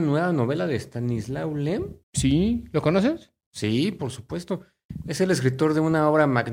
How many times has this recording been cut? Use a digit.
1